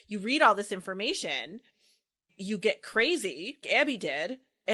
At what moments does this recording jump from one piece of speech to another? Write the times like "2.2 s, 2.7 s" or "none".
2.3 s, 3.6 s